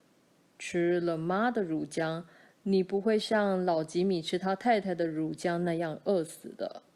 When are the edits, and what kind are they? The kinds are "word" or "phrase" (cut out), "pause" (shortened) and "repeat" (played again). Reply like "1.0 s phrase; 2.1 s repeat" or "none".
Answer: none